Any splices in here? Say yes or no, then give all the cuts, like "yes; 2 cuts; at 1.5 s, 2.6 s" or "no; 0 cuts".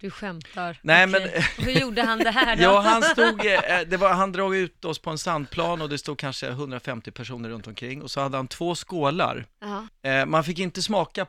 no; 0 cuts